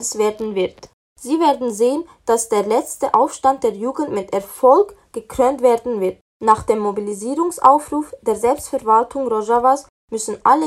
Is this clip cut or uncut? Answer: uncut